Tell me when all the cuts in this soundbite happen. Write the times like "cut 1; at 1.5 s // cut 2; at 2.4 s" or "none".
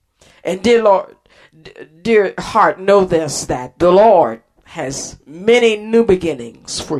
none

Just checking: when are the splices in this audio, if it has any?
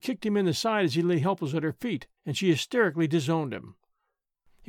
cut 1; at 2.2 s

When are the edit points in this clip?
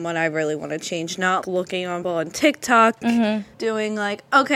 cut 1; at 1.4 s // cut 2; at 2.0 s // cut 3; at 3.0 s // cut 4; at 3.5 s

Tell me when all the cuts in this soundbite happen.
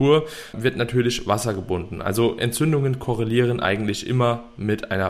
none

